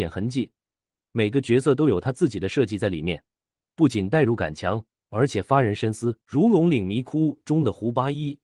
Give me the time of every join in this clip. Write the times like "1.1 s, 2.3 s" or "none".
6.2 s